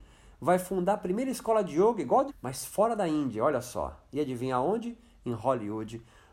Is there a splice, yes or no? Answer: yes